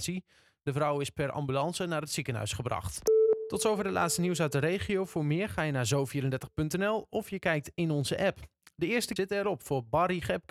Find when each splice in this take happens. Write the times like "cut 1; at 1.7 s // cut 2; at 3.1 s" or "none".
cut 1; at 9.2 s